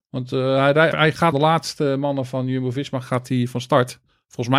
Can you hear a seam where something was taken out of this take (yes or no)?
yes